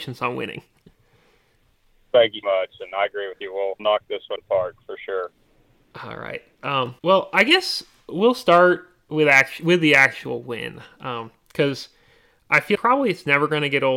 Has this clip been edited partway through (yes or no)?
yes